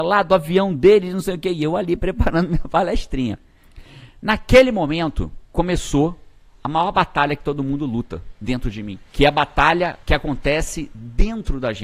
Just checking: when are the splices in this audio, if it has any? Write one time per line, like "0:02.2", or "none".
0:05.4
0:09.1
0:10.0